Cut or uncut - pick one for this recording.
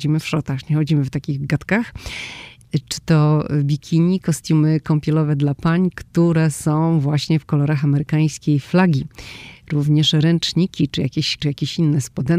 cut